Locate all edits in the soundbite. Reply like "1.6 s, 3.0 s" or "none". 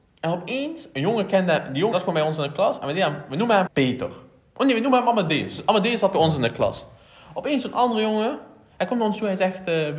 1.9 s, 3.7 s